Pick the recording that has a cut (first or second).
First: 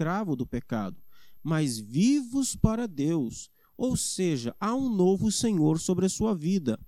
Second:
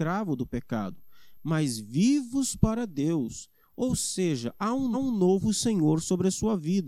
second